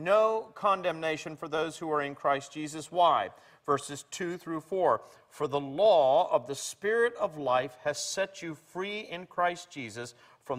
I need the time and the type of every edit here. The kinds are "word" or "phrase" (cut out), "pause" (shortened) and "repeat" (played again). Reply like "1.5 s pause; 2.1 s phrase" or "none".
none

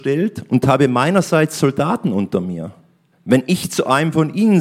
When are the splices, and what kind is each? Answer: 3.1 s pause

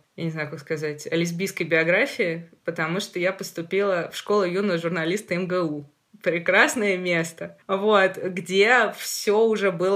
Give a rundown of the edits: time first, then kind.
none

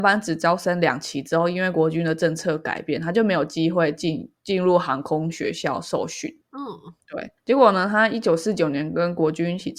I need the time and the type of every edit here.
none

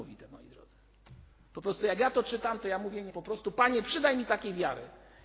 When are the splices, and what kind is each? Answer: 3.1 s word

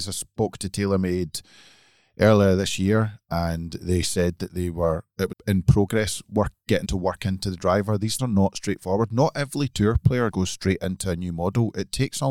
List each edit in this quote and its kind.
5.3 s word; 6.8 s word; 8.2 s word; 10.3 s word

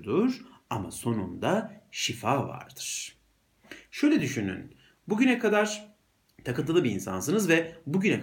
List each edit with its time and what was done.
none

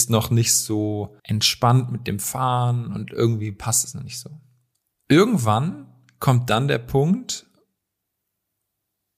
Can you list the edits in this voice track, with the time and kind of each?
1.2 s pause; 4.7 s pause

